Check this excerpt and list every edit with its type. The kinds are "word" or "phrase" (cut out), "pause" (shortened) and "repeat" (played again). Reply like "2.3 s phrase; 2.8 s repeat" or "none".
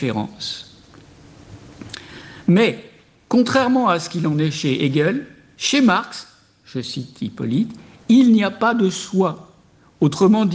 none